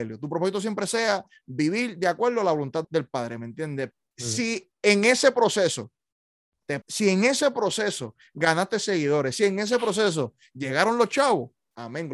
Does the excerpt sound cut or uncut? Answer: cut